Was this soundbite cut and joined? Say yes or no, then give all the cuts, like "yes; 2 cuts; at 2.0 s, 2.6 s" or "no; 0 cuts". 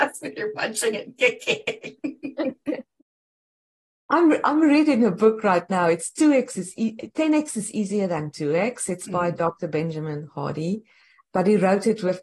yes; 1 cut; at 3.0 s